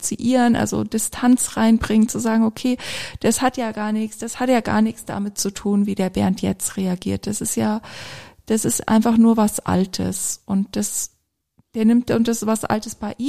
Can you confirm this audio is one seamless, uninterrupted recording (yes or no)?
no